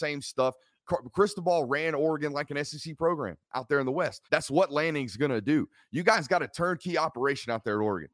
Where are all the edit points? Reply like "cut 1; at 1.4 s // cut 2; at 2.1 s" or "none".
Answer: cut 1; at 4.3 s

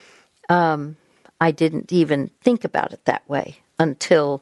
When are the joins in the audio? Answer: none

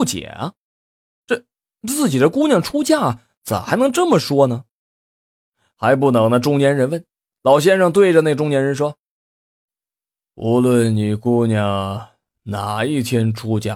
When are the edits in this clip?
none

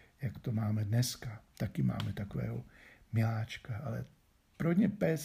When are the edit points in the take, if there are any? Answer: none

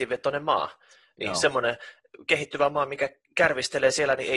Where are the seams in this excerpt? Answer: none

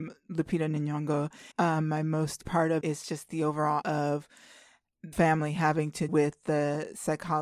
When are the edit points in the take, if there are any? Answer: cut 1; at 1.5 s // cut 2; at 2.4 s // cut 3; at 2.8 s // cut 4; at 3.8 s // cut 5; at 5.1 s // cut 6; at 6.1 s

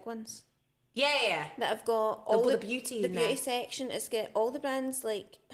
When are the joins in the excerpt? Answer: none

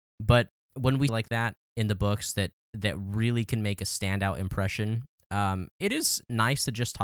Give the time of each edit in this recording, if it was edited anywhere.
cut 1; at 1.1 s // cut 2; at 1.6 s

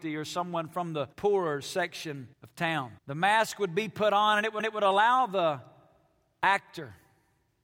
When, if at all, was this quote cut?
cut 1; at 1.1 s // cut 2; at 2.3 s // cut 3; at 3.0 s // cut 4; at 4.6 s

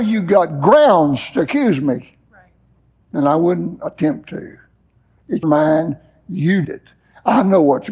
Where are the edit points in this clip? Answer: cut 1; at 2.8 s // cut 2; at 5.4 s // cut 3; at 6.6 s

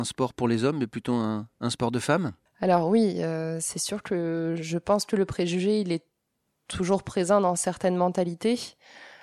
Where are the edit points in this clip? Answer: none

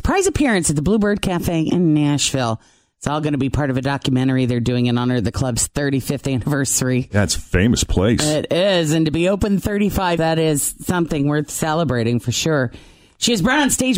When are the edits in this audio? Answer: cut 1; at 10.2 s

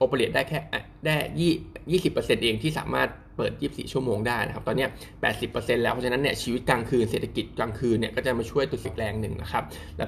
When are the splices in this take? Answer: cut 1; at 8.8 s

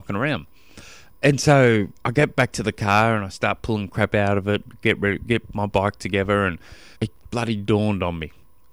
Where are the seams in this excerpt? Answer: cut 1; at 1.9 s // cut 2; at 7.0 s

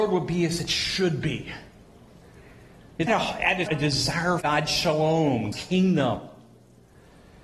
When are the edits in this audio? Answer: cut 1; at 3.1 s // cut 2; at 3.7 s // cut 3; at 4.4 s // cut 4; at 5.5 s

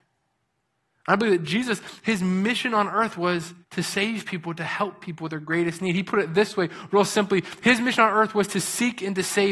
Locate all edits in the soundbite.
cut 1; at 3.6 s

